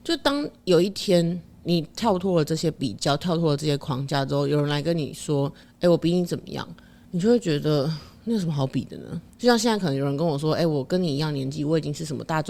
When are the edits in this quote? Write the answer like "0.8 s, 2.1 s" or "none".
9.3 s